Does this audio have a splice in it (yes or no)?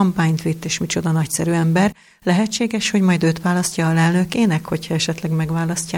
no